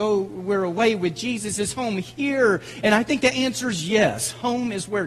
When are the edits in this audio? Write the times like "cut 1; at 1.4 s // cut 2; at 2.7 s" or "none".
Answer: none